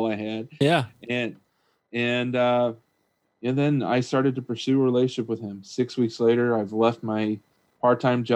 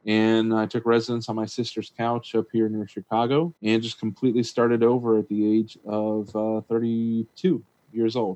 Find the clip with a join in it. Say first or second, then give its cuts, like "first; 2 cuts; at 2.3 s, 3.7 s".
second; 1 cut; at 3.6 s